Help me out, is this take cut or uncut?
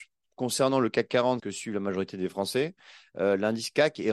cut